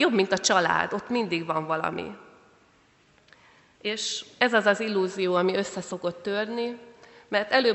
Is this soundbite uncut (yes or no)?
yes